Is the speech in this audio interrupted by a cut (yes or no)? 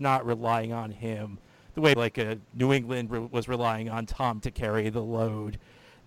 yes